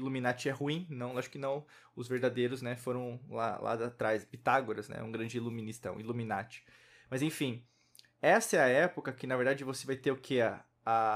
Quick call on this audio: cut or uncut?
uncut